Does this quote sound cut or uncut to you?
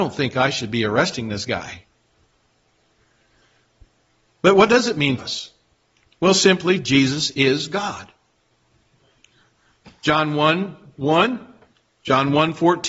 cut